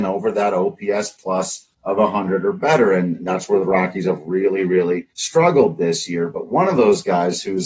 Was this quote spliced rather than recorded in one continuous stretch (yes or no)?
yes